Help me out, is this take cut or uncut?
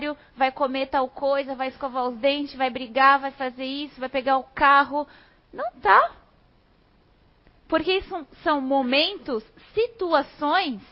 uncut